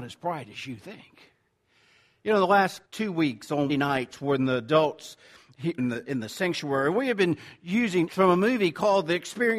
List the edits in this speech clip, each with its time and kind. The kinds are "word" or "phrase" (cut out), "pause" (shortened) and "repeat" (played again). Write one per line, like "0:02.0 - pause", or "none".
0:02.8 - pause
0:03.7 - word
0:05.8 - phrase
0:08.1 - word